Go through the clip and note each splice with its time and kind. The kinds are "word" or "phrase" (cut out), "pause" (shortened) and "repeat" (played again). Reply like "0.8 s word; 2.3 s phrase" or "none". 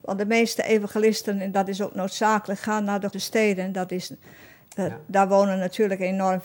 3.1 s word